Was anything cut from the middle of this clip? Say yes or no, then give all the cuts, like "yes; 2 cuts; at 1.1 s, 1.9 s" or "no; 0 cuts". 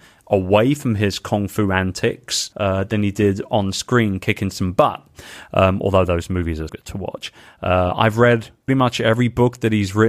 yes; 3 cuts; at 2.5 s, 6.7 s, 8.7 s